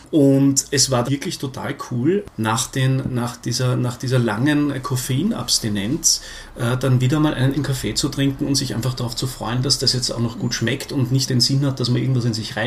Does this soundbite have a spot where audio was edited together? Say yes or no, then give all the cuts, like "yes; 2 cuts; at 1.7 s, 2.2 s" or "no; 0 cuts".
yes; 3 cuts; at 1.0 s, 7.5 s, 11.3 s